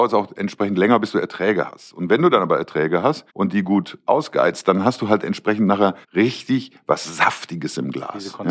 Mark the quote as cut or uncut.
cut